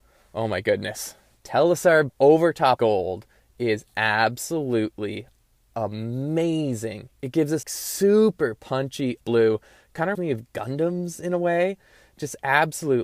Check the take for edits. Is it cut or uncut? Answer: cut